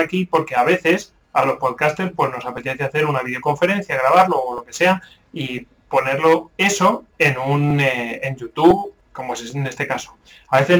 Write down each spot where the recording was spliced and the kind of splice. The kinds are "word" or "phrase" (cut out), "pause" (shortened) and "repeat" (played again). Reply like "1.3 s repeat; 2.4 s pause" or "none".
7.1 s pause; 9.0 s pause